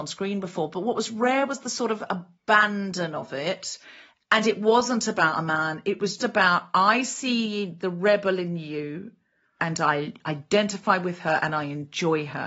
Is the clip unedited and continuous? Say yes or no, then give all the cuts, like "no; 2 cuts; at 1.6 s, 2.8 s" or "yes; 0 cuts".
no; 1 cut; at 6.2 s